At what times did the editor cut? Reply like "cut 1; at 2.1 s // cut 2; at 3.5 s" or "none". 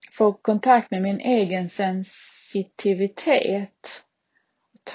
none